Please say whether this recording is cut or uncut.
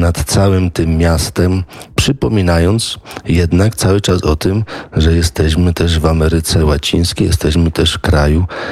uncut